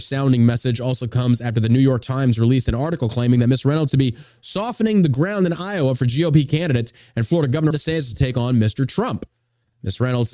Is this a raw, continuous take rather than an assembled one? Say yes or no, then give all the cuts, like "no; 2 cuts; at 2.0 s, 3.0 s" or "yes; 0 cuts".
no; 2 cuts; at 3.9 s, 7.7 s